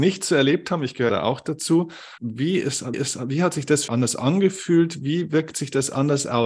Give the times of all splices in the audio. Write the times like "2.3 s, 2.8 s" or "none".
1.1 s, 2.2 s, 2.9 s, 3.9 s